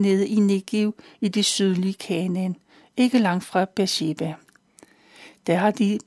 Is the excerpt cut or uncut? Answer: uncut